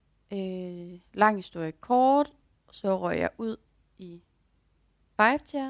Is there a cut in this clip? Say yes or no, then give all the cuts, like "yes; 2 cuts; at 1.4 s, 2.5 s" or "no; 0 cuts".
no; 0 cuts